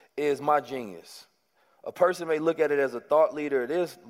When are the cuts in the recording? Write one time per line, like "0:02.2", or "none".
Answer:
none